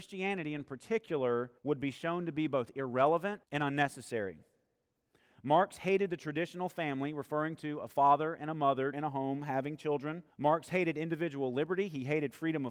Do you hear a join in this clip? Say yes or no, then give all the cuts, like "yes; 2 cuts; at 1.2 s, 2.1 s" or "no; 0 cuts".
yes; 4 cuts; at 1.6 s, 3.4 s, 8.9 s, 10.3 s